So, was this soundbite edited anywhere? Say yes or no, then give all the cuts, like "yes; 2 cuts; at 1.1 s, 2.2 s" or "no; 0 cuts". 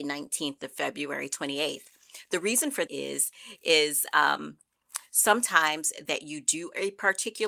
yes; 2 cuts; at 2.9 s, 6.1 s